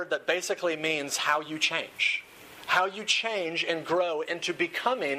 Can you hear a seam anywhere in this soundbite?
no; 0 cuts

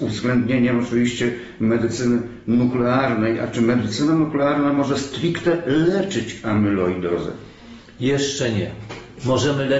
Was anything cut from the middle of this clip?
no; 0 cuts

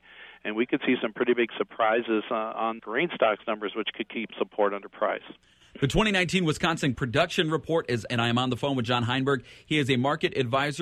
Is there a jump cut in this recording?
yes; 4 cuts; at 2.8 s, 4.3 s, 6.9 s, 8.1 s

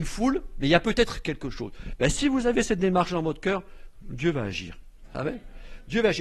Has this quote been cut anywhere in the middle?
no; 0 cuts

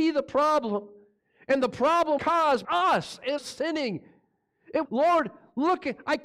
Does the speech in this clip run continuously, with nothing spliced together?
no; 4 cuts; at 2.2 s, 2.6 s, 3.4 s, 4.8 s

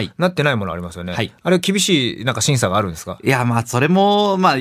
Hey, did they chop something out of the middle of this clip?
no; 0 cuts

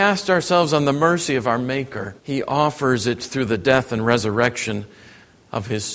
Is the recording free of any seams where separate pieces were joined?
no; 1 cut; at 2.2 s

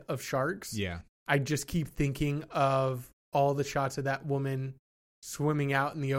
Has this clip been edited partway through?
no; 0 cuts

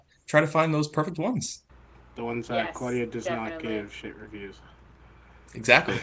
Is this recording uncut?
yes; 0 cuts

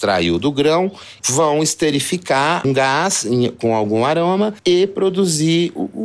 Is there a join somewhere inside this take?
yes; 2 cuts; at 1.2 s, 2.6 s

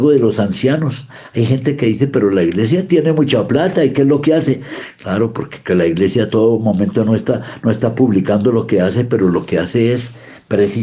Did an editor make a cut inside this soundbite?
no; 0 cuts

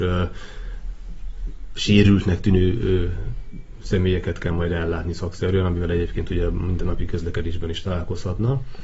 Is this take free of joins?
yes; 0 cuts

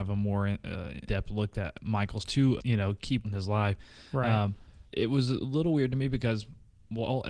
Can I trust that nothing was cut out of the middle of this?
no; 5 cuts; at 1.1 s, 2.2 s, 2.6 s, 3.2 s, 4.9 s

